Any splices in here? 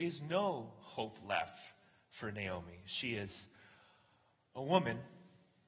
no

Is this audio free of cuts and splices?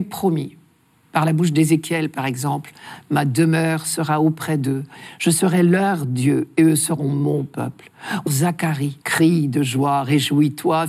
no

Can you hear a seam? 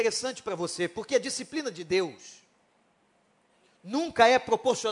no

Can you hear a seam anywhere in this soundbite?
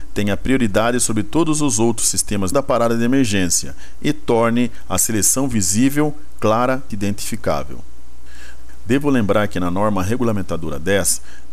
yes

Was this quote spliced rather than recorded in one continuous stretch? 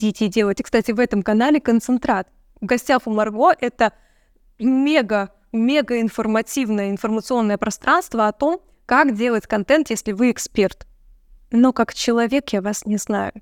no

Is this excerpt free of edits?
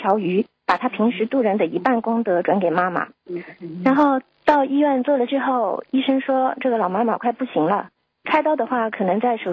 no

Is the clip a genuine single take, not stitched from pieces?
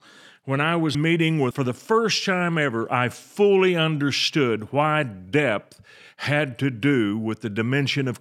no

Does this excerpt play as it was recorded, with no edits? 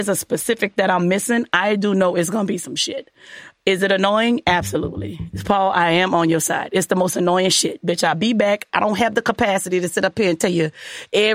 no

